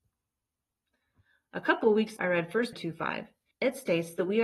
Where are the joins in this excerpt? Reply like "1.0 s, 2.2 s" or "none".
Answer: 2.2 s, 2.7 s, 3.5 s